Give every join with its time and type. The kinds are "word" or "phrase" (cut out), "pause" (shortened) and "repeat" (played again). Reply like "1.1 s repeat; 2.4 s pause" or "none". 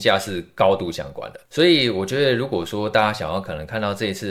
1.5 s pause